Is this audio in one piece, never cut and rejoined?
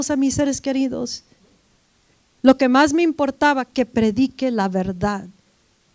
yes; 0 cuts

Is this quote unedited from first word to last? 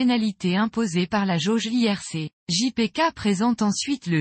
no; 1 cut; at 2.4 s

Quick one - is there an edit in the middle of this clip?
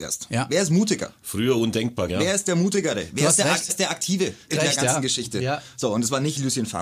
yes; 3 cuts; at 2.1 s, 3.7 s, 4.5 s

